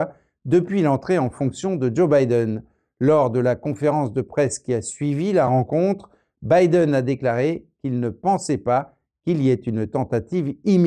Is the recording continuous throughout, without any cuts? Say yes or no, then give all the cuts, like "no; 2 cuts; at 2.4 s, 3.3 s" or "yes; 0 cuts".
yes; 0 cuts